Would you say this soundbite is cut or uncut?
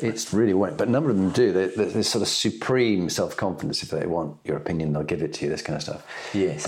uncut